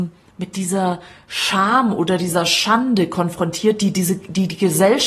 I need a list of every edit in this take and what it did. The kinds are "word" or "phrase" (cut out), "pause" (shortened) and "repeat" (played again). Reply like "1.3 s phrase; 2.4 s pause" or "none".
none